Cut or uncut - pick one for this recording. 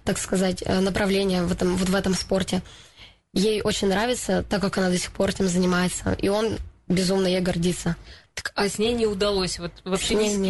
uncut